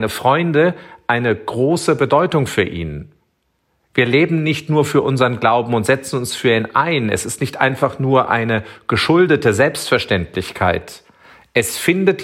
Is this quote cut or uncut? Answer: uncut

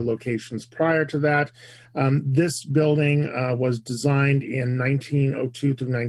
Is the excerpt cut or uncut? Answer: uncut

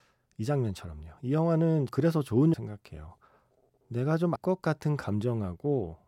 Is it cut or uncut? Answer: cut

